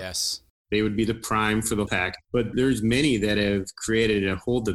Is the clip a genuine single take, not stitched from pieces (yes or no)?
no